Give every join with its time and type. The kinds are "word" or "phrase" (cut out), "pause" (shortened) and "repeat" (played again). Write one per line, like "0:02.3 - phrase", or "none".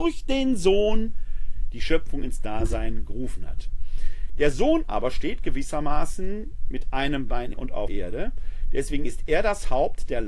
0:07.5 - word
0:07.9 - word

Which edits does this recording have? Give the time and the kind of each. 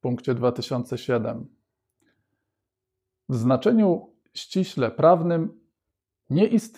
none

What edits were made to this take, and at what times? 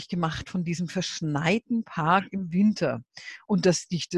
none

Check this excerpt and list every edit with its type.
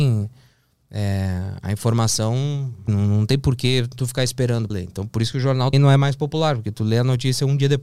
0:02.9 - word
0:04.7 - word
0:05.7 - word

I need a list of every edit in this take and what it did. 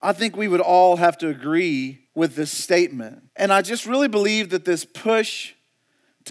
0:02.1 - pause
0:03.3 - pause

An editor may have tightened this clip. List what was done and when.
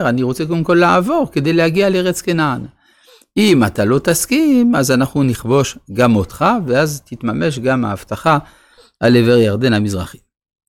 none

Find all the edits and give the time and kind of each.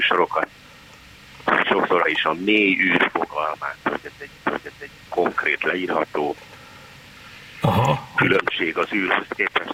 0:02.0 - phrase
0:04.4 - repeat

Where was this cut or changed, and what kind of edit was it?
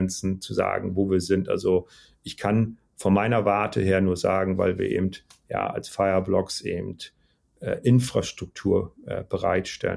none

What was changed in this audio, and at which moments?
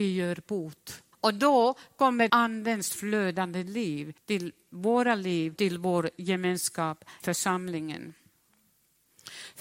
0:01.1 - pause
0:02.3 - word
0:04.2 - pause
0:05.6 - word
0:07.2 - word

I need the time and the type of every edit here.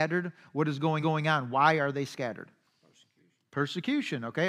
0:01.0 - repeat

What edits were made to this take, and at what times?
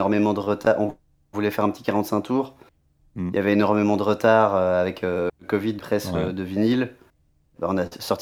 0:05.8 - word

